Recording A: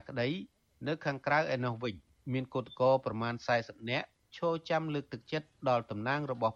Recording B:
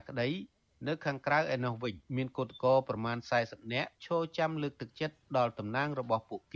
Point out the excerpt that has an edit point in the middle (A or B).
B